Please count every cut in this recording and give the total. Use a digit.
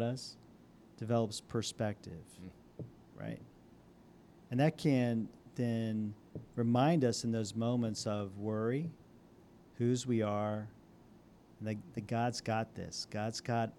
0